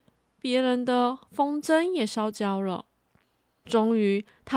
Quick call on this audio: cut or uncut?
uncut